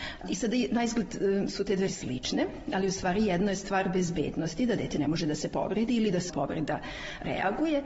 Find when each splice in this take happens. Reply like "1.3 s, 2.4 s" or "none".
1.9 s, 6.3 s

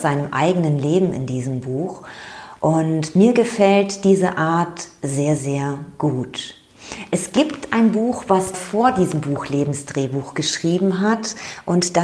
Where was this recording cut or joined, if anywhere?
5.4 s, 8.5 s

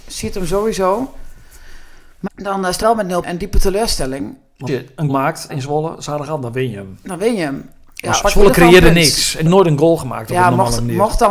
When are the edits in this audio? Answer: 2.3 s, 2.8 s, 3.2 s, 4.7 s, 5.1 s, 5.5 s, 8.2 s, 9.5 s

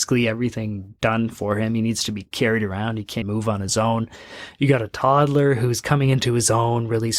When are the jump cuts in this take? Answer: 3.2 s

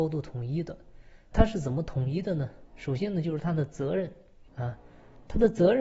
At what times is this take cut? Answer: 1.3 s, 4.5 s

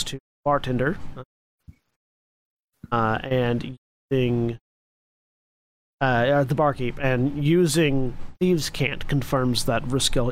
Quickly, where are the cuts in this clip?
none

